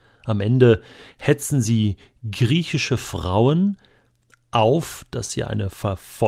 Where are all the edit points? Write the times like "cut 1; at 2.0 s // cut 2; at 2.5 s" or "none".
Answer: none